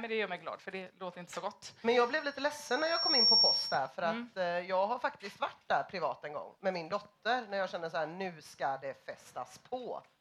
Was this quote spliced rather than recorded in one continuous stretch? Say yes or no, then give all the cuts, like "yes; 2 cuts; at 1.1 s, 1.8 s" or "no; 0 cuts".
no; 0 cuts